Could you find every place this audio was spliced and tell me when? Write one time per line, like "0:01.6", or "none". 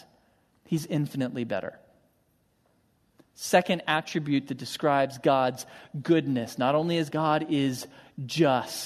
0:07.1